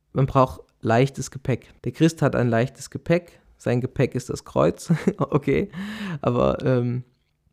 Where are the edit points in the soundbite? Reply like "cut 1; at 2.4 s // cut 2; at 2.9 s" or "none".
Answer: cut 1; at 1.8 s